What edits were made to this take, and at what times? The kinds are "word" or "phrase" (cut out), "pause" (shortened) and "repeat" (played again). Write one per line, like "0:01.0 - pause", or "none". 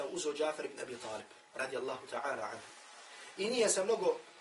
none